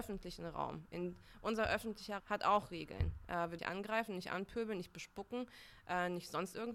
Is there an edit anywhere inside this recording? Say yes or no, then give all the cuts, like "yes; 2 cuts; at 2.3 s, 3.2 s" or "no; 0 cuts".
yes; 2 cuts; at 2.2 s, 3.6 s